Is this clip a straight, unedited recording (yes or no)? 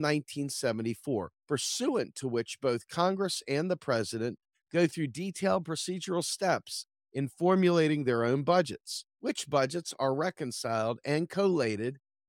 no